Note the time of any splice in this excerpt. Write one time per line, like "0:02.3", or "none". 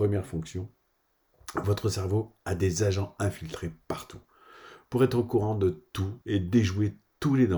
0:06.2